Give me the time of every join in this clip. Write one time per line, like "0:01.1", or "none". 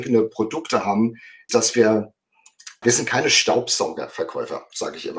0:01.5
0:02.8

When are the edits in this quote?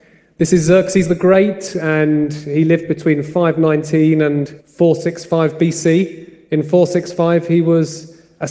0:04.6

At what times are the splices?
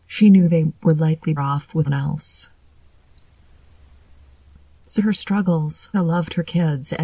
0:01.4
0:01.9
0:05.0
0:05.9

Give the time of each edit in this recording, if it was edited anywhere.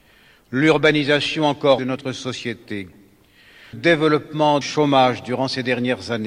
0:01.8
0:03.7
0:04.6

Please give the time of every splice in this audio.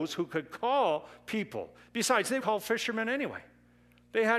0:02.4

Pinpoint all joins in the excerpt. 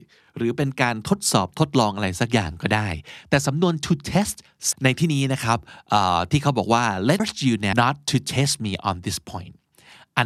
0:04.7
0:07.2
0:07.7

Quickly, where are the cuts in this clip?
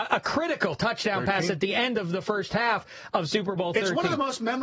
none

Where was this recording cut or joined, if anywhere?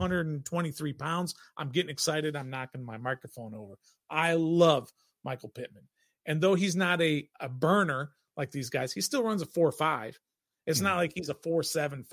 0:07.3

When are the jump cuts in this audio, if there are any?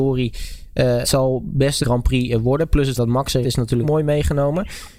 0:01.0
0:01.8
0:03.0
0:03.4
0:03.8

